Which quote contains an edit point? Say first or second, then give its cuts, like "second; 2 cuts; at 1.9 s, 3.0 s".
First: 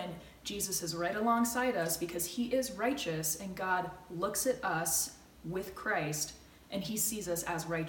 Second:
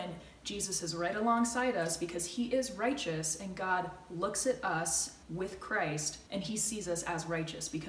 second; 2 cuts; at 5.2 s, 6.3 s